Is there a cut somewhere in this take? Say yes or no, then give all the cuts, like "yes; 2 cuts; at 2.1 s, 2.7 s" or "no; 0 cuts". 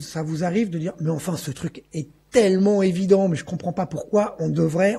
no; 0 cuts